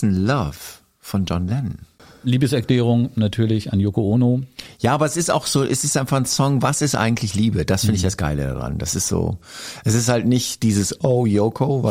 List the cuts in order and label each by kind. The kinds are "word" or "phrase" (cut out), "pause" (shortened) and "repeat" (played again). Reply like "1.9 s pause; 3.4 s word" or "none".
none

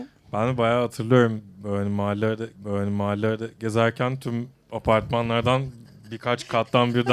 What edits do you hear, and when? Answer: 2.5 s repeat

